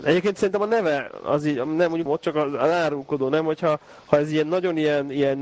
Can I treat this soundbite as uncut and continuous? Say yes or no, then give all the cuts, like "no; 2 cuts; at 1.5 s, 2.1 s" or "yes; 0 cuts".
no; 1 cut; at 2.1 s